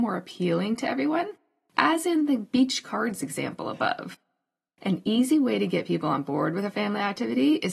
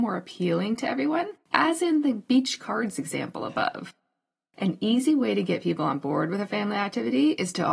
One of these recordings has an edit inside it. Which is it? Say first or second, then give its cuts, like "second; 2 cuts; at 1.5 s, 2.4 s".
second; 1 cut; at 1.4 s